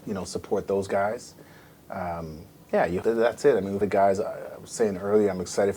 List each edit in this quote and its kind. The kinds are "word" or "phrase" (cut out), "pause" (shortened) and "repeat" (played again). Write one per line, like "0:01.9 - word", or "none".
0:02.6 - pause
0:03.0 - word
0:03.8 - phrase